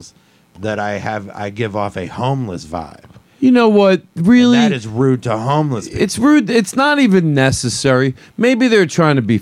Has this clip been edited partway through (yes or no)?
no